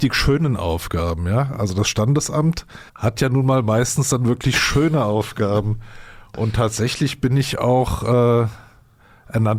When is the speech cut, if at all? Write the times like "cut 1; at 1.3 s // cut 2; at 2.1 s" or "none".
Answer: cut 1; at 2.9 s